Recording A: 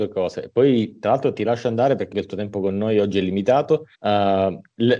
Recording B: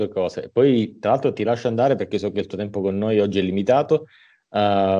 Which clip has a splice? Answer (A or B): A